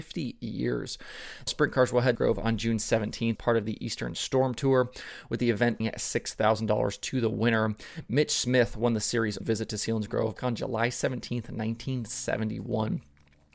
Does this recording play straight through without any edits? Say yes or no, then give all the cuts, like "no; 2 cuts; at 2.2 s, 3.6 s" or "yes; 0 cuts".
no; 6 cuts; at 1.5 s, 2.1 s, 3.3 s, 5.8 s, 9.4 s, 10.4 s